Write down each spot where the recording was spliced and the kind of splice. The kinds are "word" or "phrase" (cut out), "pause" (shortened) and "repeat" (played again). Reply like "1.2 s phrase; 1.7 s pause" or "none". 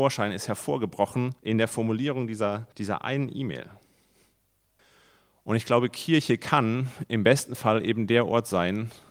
1.4 s pause; 2.7 s pause; 4.8 s pause